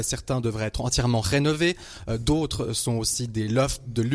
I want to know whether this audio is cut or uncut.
uncut